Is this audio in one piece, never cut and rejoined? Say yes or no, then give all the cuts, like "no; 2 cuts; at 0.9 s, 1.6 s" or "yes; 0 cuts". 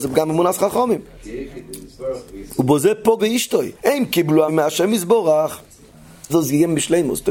no; 4 cuts; at 3.2 s, 3.8 s, 4.5 s, 6.3 s